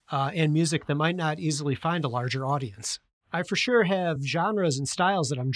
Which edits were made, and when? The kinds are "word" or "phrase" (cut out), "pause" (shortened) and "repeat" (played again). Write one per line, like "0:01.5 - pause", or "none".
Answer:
none